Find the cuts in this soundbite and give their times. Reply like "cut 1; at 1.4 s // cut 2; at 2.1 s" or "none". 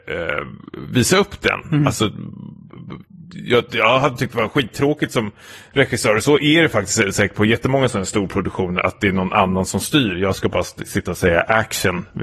none